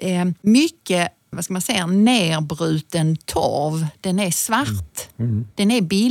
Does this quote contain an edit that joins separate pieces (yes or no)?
yes